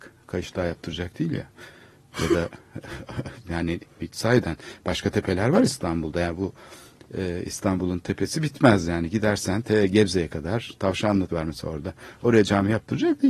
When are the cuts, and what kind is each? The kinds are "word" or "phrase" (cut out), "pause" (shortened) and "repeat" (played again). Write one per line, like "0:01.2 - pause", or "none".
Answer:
0:11.3 - word